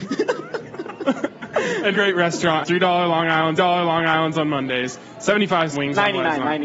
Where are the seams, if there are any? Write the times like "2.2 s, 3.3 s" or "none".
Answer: 1.9 s, 2.6 s, 3.6 s, 5.7 s